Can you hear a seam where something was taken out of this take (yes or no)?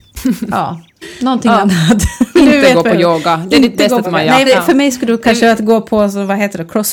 yes